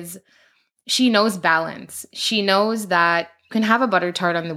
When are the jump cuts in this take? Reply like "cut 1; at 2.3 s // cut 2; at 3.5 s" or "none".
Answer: cut 1; at 3.5 s